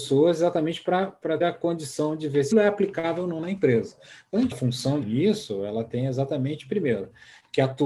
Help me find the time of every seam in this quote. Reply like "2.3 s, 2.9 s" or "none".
1.4 s, 2.5 s, 4.5 s, 5.0 s